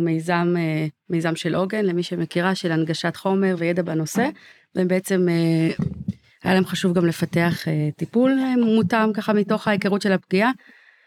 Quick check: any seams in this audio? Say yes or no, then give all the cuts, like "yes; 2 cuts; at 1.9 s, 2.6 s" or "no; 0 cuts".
no; 0 cuts